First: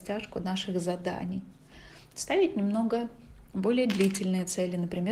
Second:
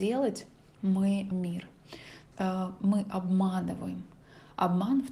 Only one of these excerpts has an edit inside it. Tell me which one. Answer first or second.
second